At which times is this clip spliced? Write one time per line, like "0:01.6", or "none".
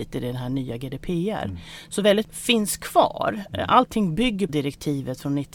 0:02.2
0:04.5

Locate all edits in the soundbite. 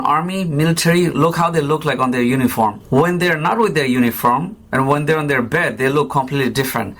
0:01.1

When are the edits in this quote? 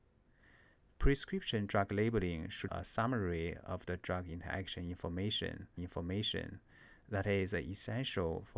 0:02.7
0:05.8

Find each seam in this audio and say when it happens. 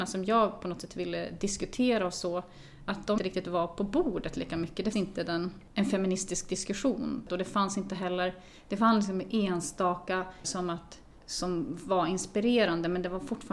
0:03.2
0:04.9
0:10.4

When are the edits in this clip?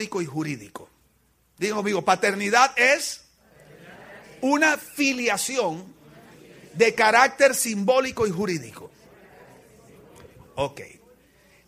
none

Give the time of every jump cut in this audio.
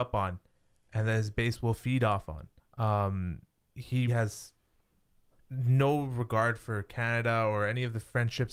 0:02.6
0:04.1

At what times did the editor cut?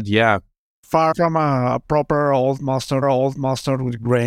0:01.1
0:03.0

